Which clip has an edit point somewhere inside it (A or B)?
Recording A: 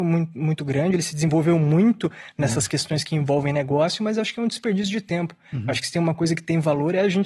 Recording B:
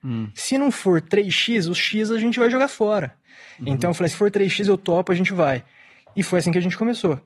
B